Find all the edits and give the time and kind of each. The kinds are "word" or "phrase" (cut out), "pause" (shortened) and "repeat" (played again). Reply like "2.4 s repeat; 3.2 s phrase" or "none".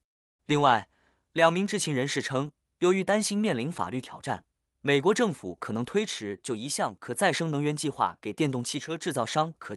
none